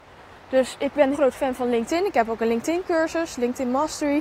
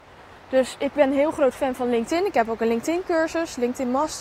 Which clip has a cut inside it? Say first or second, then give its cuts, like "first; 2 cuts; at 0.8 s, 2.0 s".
first; 1 cut; at 1.1 s